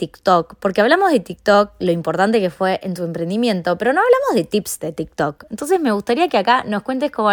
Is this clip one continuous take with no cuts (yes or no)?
yes